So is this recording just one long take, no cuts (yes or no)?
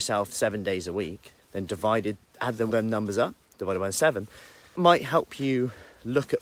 no